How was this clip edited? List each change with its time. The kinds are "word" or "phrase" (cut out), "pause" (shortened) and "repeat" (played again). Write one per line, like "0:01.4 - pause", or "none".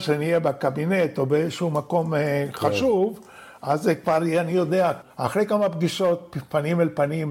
0:05.1 - pause